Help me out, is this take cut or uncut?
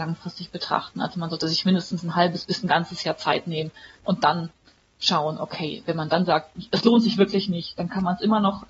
uncut